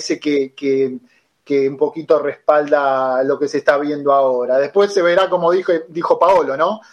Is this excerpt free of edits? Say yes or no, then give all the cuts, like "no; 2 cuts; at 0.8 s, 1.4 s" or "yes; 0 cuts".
yes; 0 cuts